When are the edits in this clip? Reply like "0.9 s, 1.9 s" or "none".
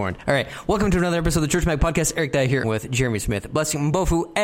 2.6 s